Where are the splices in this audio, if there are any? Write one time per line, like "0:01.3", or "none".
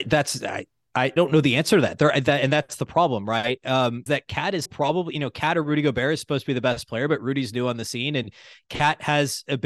0:01.2
0:04.1
0:04.7